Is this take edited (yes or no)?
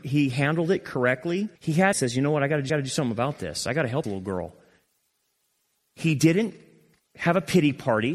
yes